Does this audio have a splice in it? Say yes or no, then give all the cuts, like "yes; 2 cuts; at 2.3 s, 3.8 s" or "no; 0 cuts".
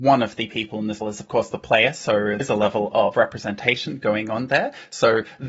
yes; 3 cuts; at 1.0 s, 2.4 s, 3.1 s